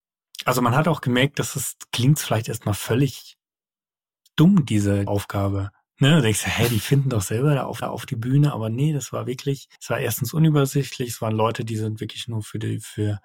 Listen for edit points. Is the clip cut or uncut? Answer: cut